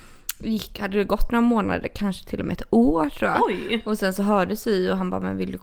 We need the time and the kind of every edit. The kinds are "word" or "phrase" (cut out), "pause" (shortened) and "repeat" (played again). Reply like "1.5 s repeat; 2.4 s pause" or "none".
none